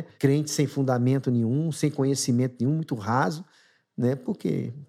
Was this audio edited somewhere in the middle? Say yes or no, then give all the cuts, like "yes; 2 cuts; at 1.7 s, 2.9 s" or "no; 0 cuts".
no; 0 cuts